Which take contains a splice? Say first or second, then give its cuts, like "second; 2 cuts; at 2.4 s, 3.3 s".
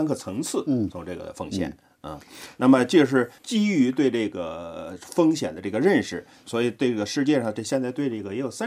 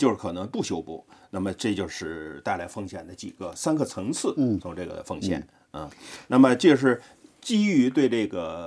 first; 2 cuts; at 3.4 s, 6.4 s